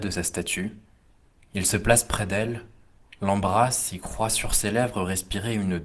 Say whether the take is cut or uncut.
uncut